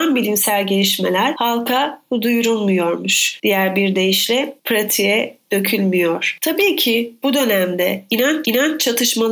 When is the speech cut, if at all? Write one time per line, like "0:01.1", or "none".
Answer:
0:08.4